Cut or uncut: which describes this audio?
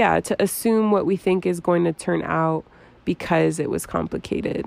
uncut